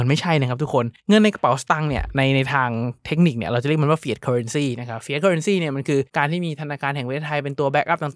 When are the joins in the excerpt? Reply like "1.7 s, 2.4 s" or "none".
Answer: 1.0 s, 6.1 s